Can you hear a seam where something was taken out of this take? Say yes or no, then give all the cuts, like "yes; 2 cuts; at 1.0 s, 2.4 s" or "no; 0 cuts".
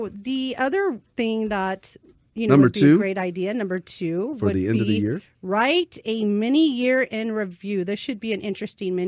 no; 0 cuts